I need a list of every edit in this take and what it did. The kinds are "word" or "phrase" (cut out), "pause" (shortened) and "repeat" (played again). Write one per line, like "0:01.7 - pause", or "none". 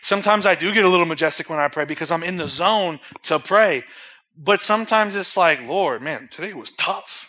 none